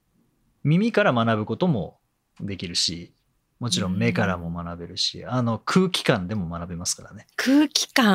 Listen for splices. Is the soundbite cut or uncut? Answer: uncut